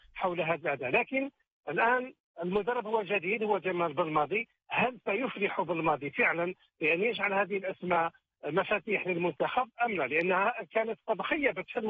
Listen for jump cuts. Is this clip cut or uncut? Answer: uncut